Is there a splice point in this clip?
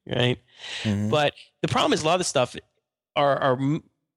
no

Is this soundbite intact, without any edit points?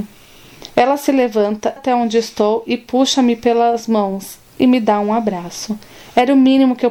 no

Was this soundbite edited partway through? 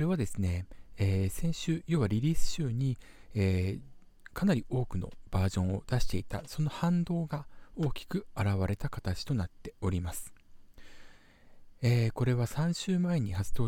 no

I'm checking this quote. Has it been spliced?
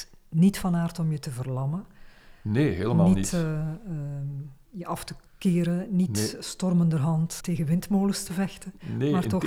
yes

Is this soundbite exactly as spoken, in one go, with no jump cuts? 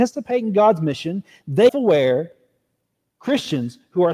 no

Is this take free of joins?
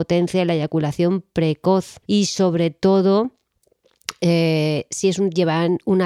no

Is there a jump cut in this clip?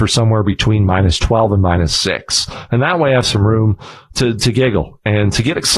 no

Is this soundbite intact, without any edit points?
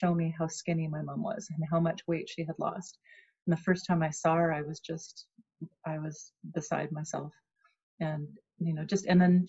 yes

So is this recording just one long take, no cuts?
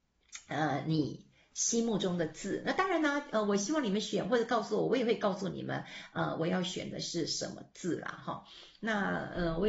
yes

